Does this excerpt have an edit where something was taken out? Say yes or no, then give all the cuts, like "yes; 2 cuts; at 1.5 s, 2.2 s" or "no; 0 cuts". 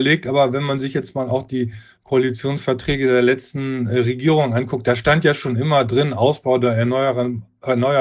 no; 0 cuts